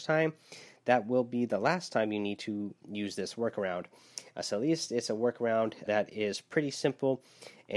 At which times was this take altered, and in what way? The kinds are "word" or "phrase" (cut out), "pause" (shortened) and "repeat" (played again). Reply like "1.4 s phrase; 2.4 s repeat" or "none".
5.9 s word